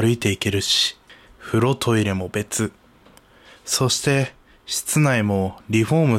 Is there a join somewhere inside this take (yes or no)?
no